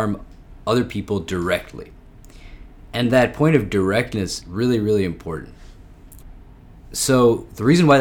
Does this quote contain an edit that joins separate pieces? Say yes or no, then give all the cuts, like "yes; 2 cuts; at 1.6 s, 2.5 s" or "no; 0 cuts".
yes; 1 cut; at 4.4 s